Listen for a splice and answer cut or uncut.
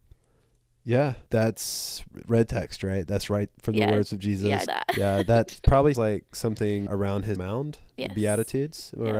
cut